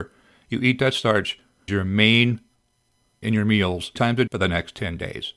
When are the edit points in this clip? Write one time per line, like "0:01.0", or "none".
0:01.7
0:03.2
0:04.0
0:04.3